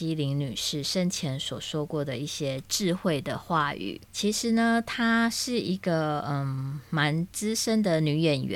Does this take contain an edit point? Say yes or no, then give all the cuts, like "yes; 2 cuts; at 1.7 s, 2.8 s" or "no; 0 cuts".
yes; 1 cut; at 4.0 s